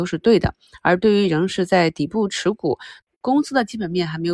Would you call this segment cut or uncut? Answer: uncut